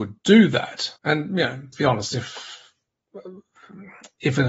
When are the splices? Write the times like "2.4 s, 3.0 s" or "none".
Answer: 1.0 s, 1.7 s